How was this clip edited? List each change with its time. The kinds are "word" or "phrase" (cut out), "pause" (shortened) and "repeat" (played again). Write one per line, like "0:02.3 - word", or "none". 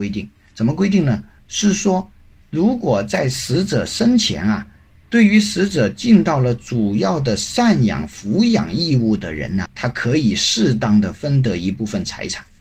0:09.7 - word